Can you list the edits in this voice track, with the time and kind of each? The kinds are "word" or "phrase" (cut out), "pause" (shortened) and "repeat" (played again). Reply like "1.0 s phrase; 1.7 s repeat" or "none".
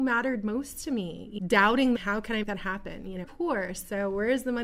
1.4 s word; 2.0 s phrase; 2.4 s word; 3.2 s word